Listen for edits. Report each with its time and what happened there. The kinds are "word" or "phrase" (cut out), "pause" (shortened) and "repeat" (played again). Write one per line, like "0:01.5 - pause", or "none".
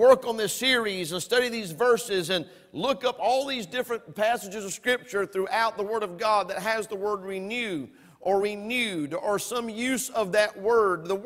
none